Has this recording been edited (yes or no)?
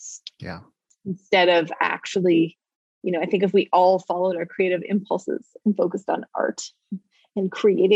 no